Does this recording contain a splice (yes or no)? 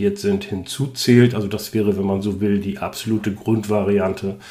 no